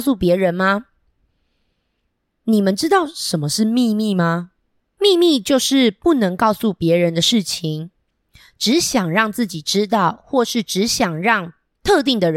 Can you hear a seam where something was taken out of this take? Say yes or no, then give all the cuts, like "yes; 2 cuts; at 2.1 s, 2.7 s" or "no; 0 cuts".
no; 0 cuts